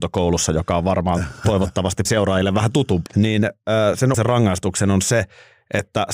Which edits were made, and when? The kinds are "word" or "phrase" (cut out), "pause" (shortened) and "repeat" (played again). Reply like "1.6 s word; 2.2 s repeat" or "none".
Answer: 2.1 s word; 3.1 s word; 4.1 s word